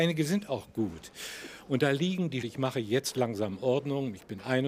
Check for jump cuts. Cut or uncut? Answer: cut